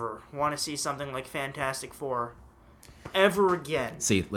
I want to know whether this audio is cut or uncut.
uncut